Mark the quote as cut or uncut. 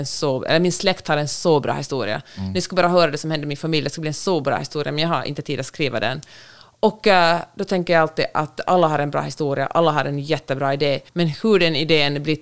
cut